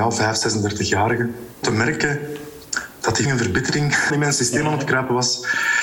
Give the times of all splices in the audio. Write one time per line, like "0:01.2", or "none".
0:01.6
0:03.2
0:04.1